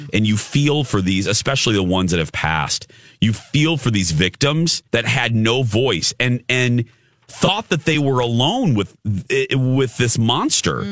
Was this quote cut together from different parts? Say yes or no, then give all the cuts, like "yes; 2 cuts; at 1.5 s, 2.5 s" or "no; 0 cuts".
yes; 1 cut; at 4.9 s